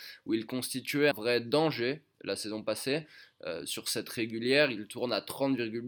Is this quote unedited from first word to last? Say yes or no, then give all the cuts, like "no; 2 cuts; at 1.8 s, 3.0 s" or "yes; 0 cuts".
no; 1 cut; at 1.1 s